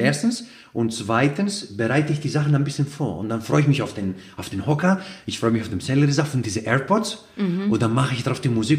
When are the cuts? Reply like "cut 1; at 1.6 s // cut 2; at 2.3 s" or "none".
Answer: none